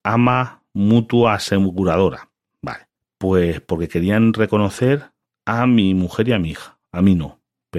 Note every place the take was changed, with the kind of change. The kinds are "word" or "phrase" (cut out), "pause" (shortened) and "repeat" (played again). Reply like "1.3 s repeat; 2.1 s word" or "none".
none